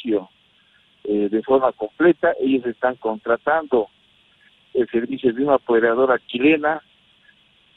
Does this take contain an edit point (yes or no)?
no